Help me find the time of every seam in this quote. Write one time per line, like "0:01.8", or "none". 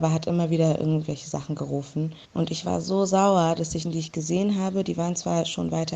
0:02.2
0:03.8